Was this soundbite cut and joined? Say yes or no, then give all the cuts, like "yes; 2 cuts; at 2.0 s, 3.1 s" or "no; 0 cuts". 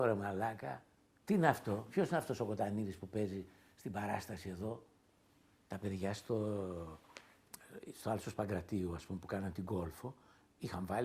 yes; 1 cut; at 5.0 s